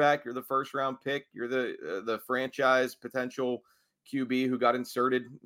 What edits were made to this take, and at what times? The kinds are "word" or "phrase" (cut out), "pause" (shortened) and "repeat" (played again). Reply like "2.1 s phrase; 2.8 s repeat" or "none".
none